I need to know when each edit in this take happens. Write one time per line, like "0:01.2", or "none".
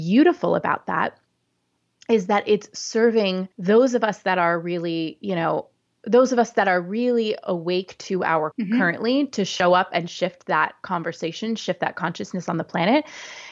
0:03.5
0:08.5